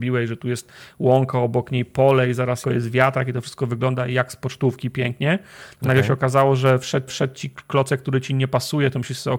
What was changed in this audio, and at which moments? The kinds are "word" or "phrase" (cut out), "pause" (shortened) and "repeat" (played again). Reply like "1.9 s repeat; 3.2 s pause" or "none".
2.6 s phrase; 7.1 s repeat